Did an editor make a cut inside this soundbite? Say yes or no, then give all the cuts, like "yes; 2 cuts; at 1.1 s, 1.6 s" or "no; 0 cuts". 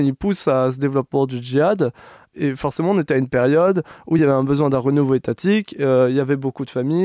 no; 0 cuts